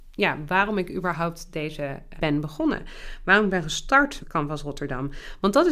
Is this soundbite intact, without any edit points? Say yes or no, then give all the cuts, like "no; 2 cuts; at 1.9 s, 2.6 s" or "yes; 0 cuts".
no; 2 cuts; at 2.2 s, 4.2 s